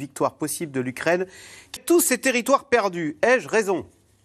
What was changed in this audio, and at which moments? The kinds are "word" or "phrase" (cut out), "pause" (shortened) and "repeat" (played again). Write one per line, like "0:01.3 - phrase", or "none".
0:01.8 - word